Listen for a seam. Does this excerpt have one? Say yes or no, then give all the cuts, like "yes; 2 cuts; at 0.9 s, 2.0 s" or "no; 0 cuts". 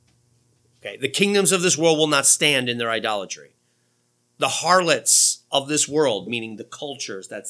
no; 0 cuts